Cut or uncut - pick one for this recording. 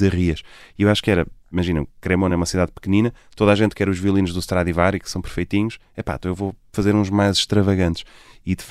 uncut